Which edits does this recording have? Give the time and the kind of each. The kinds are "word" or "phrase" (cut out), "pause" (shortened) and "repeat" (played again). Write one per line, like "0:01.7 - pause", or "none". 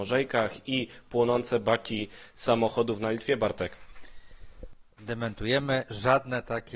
0:04.9 - pause